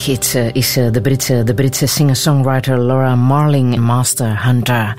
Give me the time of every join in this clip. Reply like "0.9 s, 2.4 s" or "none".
1.3 s, 3.8 s